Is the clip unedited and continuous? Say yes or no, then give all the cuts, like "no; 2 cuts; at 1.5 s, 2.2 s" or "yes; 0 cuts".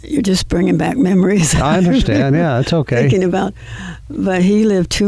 yes; 0 cuts